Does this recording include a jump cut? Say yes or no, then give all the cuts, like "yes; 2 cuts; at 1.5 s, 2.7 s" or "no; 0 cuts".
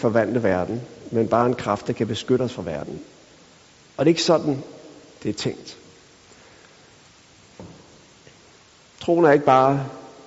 no; 0 cuts